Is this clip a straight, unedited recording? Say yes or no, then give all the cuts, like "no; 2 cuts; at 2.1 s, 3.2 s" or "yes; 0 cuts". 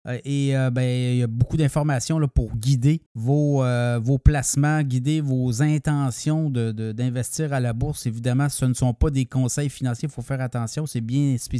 no; 1 cut; at 3.1 s